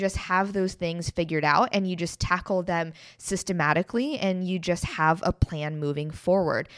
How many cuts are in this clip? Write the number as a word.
zero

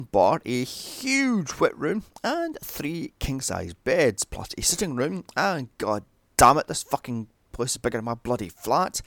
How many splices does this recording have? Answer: zero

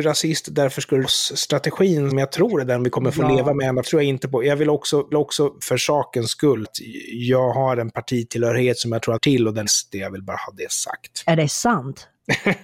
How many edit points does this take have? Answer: seven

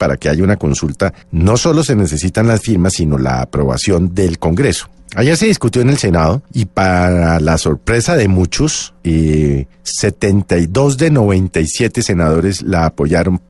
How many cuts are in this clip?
four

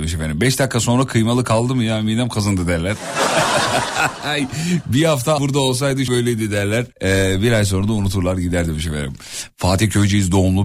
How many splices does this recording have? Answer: three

